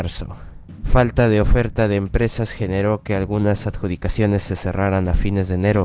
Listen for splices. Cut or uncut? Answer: uncut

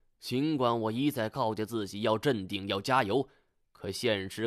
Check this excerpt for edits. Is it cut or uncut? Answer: uncut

